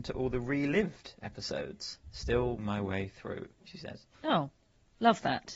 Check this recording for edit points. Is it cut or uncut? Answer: cut